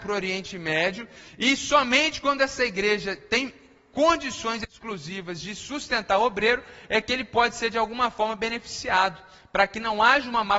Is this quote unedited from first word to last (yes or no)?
yes